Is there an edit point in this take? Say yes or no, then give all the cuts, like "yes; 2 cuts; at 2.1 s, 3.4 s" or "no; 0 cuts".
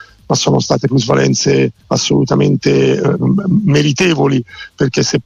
yes; 1 cut; at 1.8 s